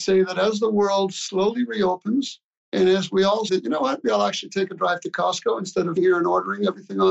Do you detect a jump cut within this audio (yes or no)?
yes